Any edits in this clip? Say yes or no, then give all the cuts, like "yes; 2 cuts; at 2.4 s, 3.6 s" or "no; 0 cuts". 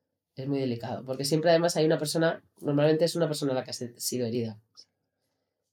no; 0 cuts